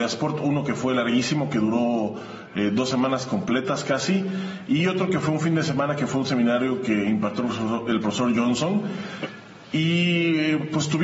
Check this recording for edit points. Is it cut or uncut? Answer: uncut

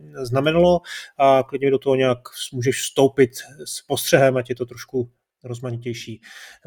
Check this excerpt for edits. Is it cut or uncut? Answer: uncut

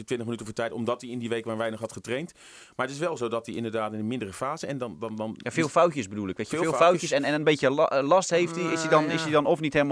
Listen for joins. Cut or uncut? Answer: uncut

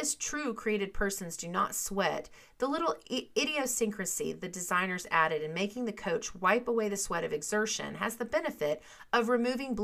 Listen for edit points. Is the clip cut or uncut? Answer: uncut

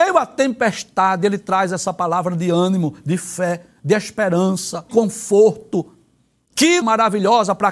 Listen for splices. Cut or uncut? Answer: cut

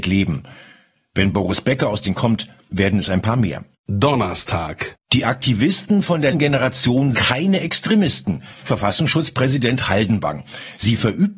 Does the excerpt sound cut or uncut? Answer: cut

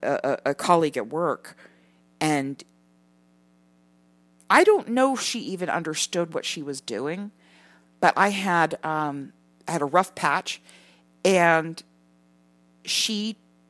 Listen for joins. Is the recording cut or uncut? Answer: uncut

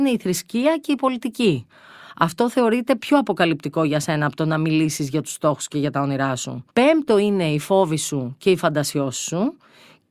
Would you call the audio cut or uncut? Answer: cut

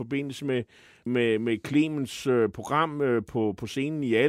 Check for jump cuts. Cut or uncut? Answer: cut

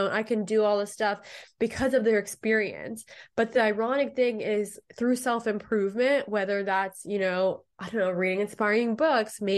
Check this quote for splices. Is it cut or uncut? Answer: uncut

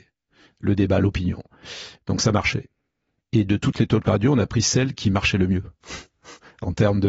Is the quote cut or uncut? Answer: uncut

